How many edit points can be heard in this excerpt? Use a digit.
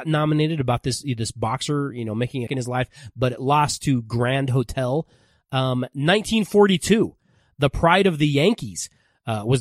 1